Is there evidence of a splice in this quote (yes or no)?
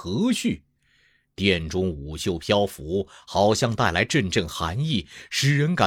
no